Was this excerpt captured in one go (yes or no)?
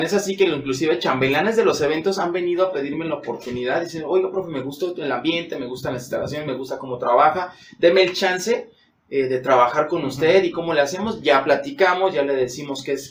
yes